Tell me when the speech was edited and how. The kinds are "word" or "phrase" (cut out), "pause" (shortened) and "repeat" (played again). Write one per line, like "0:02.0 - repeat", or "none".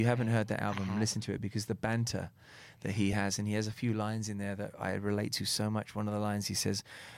none